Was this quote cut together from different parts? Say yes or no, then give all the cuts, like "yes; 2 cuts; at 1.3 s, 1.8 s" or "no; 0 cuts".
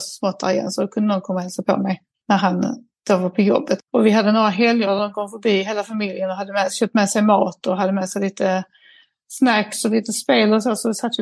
no; 0 cuts